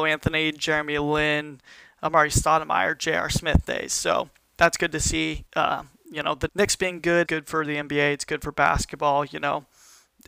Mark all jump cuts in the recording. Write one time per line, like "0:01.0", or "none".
0:05.5
0:06.5
0:07.2